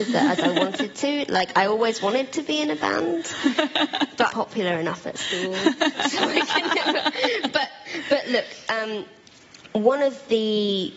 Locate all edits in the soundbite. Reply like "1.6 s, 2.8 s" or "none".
4.3 s